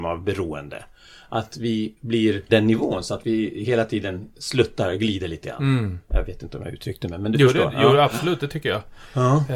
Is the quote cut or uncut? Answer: cut